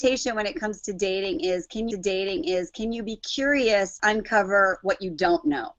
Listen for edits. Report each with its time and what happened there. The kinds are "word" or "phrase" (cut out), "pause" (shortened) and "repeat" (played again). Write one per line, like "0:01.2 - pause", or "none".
0:01.9 - repeat
0:04.0 - word